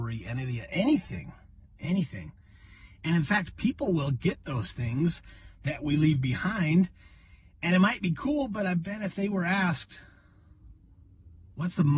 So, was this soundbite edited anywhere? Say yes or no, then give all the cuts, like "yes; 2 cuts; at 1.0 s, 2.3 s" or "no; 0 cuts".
no; 0 cuts